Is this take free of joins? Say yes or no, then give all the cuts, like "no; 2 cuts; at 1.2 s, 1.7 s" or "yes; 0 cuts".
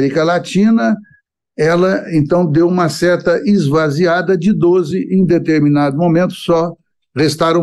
yes; 0 cuts